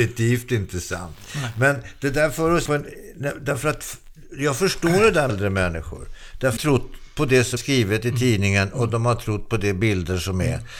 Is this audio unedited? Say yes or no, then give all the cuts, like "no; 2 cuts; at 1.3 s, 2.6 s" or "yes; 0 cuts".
no; 4 cuts; at 2.7 s, 5.3 s, 6.6 s, 7.6 s